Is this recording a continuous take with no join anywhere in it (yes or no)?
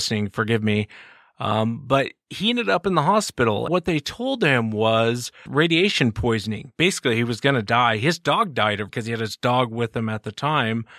no